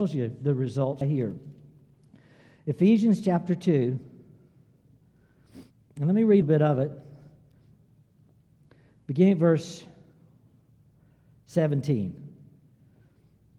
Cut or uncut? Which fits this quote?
cut